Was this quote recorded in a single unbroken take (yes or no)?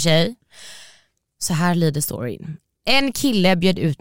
yes